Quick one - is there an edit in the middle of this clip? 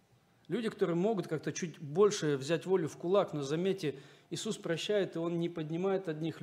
no; 0 cuts

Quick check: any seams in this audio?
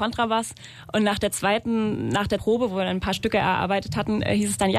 yes; 1 cut; at 2.4 s

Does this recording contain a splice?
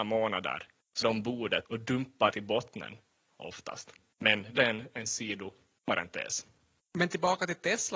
yes; 4 cuts; at 1.0 s, 1.6 s, 2.3 s, 4.6 s

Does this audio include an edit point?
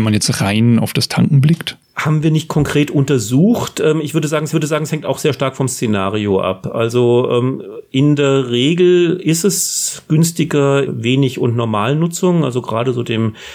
yes; 2 cuts; at 4.5 s, 10.8 s

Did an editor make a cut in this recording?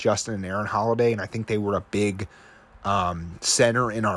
no; 0 cuts

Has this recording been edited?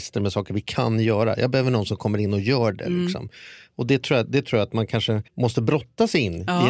yes; 1 cut; at 5.3 s

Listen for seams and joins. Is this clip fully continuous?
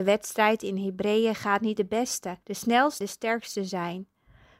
no; 3 cuts; at 1.8 s, 2.4 s, 3.0 s

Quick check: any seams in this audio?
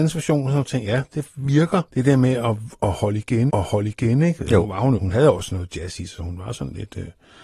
yes; 4 cuts; at 1.9 s, 3.5 s, 5.0 s, 6.2 s

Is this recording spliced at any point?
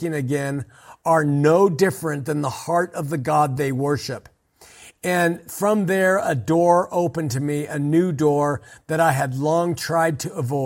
no; 0 cuts

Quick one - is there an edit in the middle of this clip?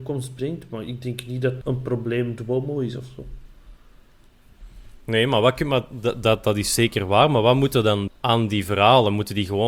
yes; 3 cuts; at 1.6 s, 6.2 s, 8.1 s

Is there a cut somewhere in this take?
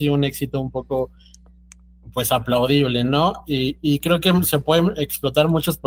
no; 0 cuts

